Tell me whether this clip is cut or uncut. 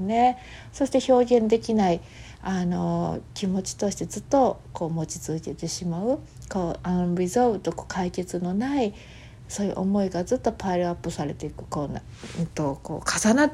uncut